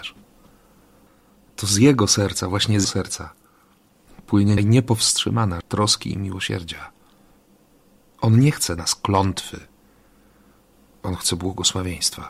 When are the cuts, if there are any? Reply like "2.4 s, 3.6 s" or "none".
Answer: 1.5 s, 2.8 s, 4.6 s, 5.6 s, 8.8 s